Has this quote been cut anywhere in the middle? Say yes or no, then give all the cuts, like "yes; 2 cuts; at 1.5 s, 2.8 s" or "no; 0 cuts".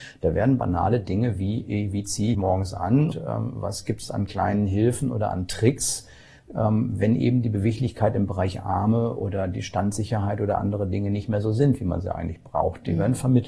yes; 2 cuts; at 2.3 s, 3.1 s